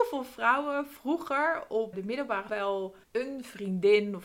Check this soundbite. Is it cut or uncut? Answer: cut